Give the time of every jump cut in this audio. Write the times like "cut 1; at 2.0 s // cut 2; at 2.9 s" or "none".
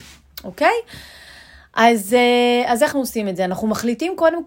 cut 1; at 2.9 s